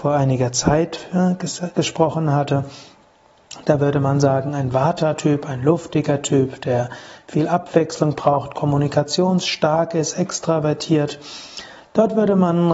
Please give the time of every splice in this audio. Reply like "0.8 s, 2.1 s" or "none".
none